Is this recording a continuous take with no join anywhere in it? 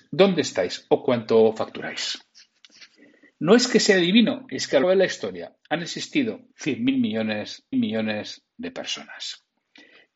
no; 3 cuts; at 4.8 s, 6.5 s, 7.7 s

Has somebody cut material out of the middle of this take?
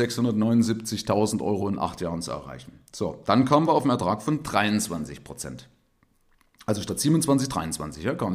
no; 0 cuts

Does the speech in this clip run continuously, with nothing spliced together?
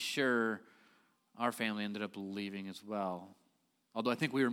yes; 0 cuts

